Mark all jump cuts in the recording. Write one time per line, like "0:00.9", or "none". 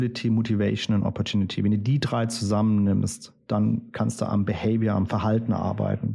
none